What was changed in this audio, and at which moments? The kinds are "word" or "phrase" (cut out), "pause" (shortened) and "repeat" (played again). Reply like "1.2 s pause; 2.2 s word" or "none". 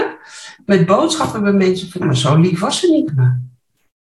2.0 s word; 3.1 s word